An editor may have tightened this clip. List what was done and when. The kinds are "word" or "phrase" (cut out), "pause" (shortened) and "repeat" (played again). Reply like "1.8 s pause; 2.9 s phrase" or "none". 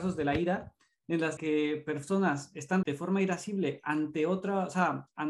1.4 s word; 2.8 s word